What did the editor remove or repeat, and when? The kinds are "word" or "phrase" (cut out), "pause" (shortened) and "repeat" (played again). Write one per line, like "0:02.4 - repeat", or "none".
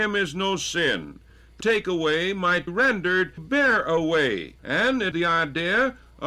0:01.6 - word
0:02.7 - word
0:03.4 - word
0:04.6 - pause
0:05.1 - word